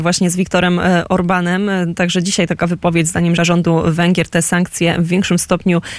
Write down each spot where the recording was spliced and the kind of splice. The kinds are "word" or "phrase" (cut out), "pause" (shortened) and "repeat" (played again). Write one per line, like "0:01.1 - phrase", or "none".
0:03.4 - word

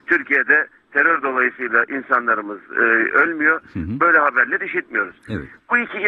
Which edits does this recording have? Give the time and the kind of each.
none

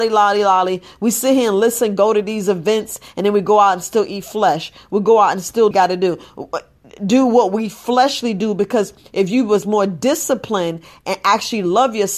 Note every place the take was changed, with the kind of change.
0:05.7 - phrase

